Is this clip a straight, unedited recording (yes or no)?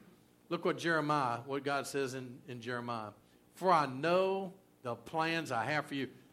yes